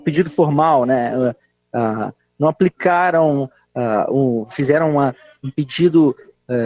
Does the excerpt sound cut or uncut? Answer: uncut